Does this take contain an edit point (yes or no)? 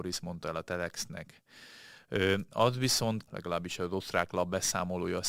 yes